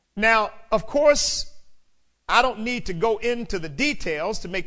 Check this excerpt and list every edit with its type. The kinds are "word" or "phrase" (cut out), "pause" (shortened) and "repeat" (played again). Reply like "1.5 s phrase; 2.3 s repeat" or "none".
none